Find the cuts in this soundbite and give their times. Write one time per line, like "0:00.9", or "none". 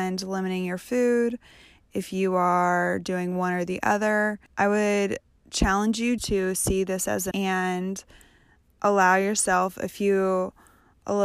0:04.5
0:06.2
0:07.3